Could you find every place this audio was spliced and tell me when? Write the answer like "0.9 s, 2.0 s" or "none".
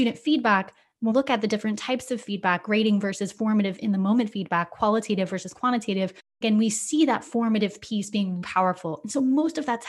1.1 s, 8.4 s